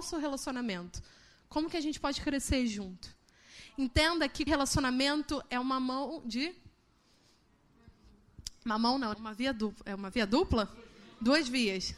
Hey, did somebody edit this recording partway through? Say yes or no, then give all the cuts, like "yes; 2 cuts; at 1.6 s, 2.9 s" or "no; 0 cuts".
yes; 2 cuts; at 4.5 s, 9.1 s